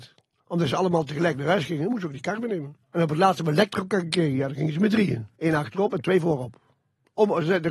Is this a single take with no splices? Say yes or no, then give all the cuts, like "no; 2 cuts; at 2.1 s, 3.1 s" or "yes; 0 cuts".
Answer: no; 2 cuts; at 2.8 s, 5.4 s